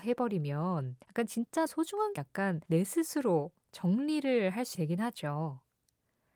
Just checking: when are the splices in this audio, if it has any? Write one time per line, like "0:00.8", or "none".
0:01.0
0:01.7
0:02.2
0:02.6
0:04.7